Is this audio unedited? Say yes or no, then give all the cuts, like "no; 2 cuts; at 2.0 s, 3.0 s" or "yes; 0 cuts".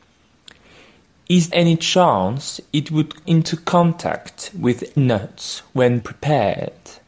no; 4 cuts; at 1.5 s, 3.2 s, 5.0 s, 6.0 s